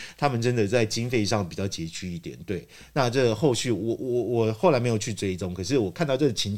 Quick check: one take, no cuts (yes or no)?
yes